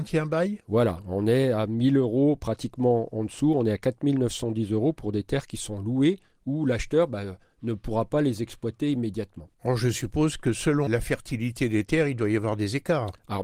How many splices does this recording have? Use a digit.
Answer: 2